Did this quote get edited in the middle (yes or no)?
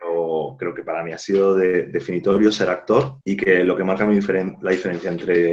yes